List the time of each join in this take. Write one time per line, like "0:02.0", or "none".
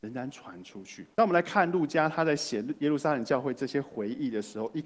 0:01.1